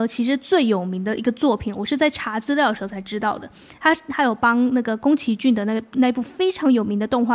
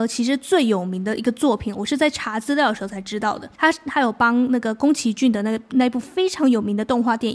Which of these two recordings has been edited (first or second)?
second